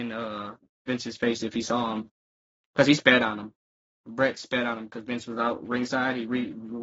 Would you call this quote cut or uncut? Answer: uncut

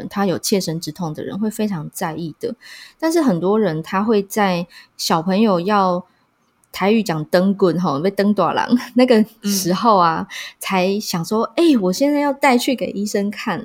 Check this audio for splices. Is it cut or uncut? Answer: uncut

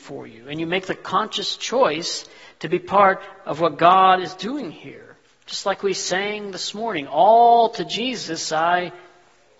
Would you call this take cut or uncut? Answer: uncut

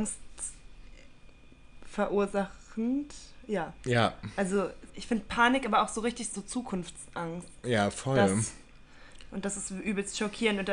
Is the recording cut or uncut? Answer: cut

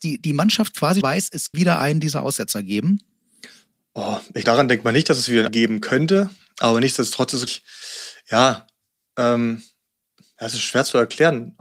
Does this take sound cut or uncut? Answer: cut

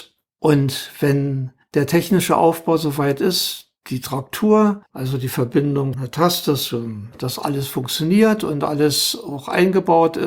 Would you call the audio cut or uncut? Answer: cut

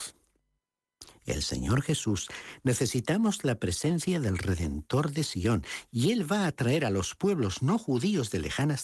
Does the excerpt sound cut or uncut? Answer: uncut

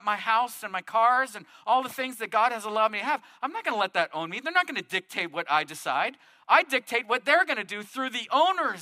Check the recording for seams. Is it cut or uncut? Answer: uncut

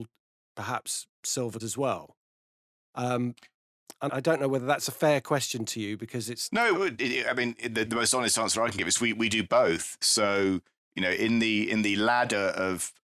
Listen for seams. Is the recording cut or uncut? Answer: cut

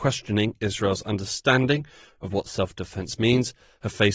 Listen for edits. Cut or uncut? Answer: uncut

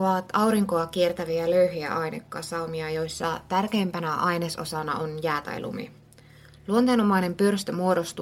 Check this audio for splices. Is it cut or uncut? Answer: uncut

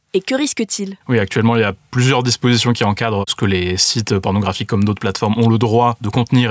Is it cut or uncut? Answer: cut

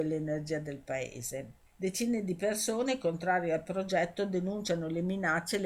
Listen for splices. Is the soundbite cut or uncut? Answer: cut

